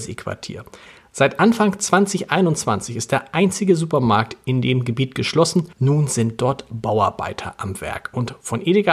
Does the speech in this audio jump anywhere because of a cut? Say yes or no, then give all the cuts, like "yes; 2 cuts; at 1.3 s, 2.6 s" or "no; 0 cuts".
yes; 1 cut; at 5.7 s